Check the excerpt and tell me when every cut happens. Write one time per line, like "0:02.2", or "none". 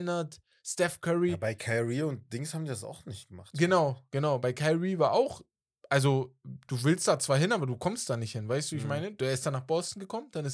none